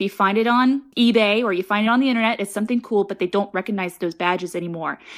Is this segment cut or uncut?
uncut